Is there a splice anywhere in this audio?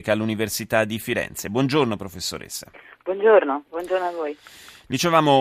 no; 0 cuts

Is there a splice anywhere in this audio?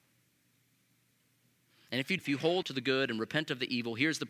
yes; 2 cuts; at 2.2 s, 2.6 s

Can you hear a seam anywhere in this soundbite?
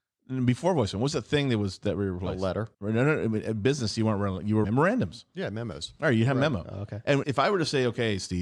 yes; 3 cuts; at 2.7 s, 4.6 s, 7.2 s

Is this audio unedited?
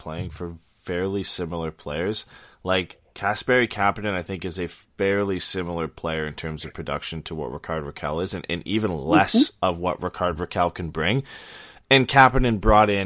yes; 0 cuts

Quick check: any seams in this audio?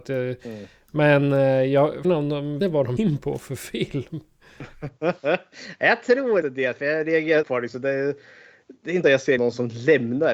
yes; 7 cuts; at 2.0 s, 2.6 s, 3.0 s, 6.4 s, 7.4 s, 9.0 s, 9.4 s

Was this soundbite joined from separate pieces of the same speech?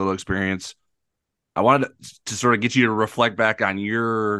no; 0 cuts

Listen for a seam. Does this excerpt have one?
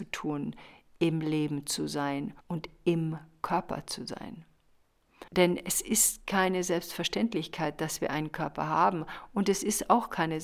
yes; 2 cuts; at 2.4 s, 5.3 s

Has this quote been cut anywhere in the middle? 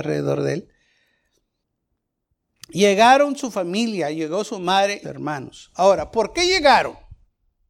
yes; 1 cut; at 5.0 s

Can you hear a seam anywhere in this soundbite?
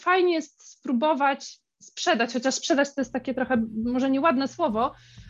no; 0 cuts

